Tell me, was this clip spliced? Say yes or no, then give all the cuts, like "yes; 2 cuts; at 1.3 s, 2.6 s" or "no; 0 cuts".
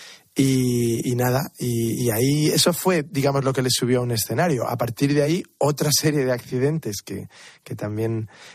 no; 0 cuts